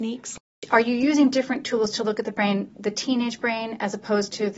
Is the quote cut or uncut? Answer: uncut